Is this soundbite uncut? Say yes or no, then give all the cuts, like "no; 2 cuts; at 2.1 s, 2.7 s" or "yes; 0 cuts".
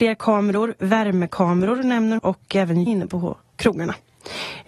no; 2 cuts; at 2.2 s, 2.9 s